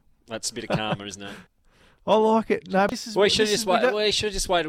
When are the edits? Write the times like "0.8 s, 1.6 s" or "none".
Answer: 1.5 s